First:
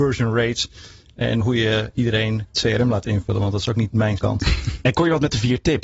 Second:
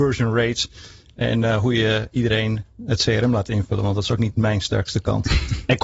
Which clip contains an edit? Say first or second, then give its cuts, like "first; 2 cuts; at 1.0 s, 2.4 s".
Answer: first; 3 cuts; at 1.4 s, 2.5 s, 4.2 s